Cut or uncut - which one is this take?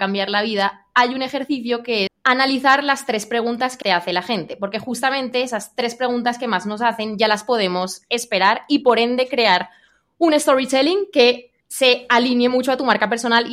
cut